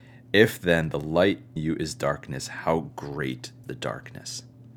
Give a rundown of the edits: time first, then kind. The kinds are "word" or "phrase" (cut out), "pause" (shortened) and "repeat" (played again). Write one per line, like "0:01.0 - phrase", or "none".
0:01.6 - word
0:03.6 - word